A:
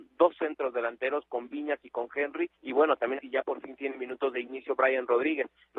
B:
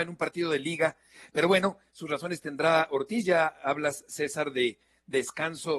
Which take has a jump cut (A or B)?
A